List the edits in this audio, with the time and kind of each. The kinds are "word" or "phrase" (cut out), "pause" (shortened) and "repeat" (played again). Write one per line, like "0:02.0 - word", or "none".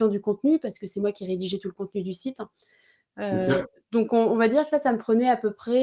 none